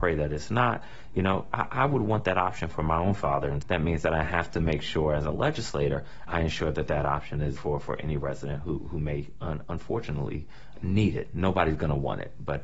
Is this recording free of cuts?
no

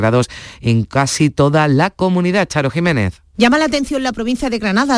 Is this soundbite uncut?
no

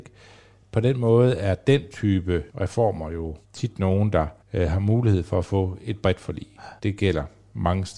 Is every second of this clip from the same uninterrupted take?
no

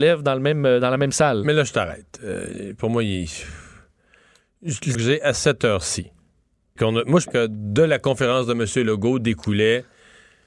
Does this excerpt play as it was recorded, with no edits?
no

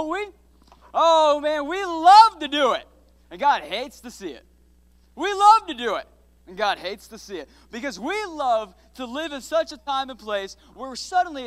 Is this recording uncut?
yes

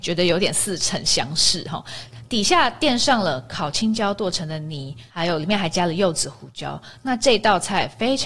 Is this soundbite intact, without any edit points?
no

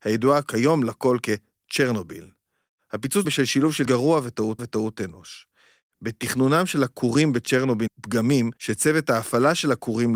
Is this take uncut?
no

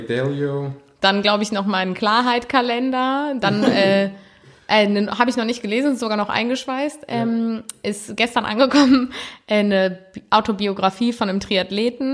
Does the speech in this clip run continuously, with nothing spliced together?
yes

